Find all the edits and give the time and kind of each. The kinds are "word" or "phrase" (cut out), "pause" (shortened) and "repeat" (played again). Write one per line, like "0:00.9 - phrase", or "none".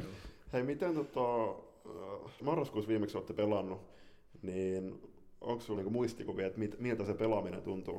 0:02.4 - word
0:05.8 - word